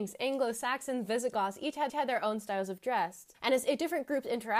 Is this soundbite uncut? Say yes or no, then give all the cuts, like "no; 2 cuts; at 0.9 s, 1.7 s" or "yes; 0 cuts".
no; 2 cuts; at 1.9 s, 3.3 s